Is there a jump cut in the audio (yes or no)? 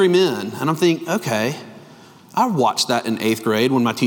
no